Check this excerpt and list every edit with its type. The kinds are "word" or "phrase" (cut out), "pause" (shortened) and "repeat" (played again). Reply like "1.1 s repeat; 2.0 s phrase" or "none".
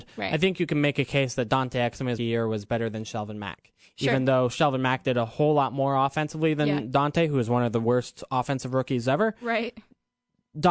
2.2 s word